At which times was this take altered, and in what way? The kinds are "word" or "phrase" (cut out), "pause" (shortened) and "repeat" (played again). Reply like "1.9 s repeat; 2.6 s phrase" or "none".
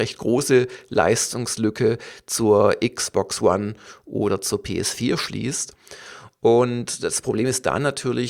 none

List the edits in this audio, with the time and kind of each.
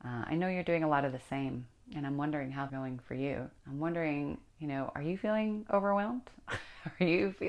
2.7 s phrase; 3.6 s pause; 4.5 s pause

